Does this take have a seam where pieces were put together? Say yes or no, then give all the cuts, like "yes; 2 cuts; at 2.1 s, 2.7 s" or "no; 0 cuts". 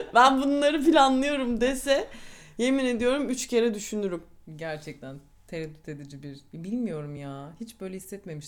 no; 0 cuts